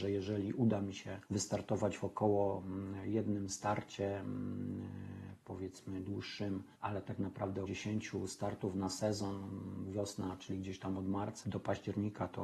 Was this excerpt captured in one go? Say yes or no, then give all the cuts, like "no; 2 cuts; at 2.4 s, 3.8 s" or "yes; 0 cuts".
no; 4 cuts; at 1.2 s, 6.7 s, 7.7 s, 11.4 s